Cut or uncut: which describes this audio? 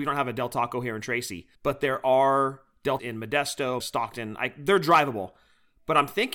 cut